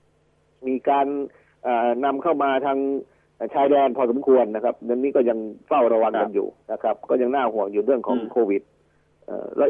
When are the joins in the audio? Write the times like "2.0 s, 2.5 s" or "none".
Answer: 6.6 s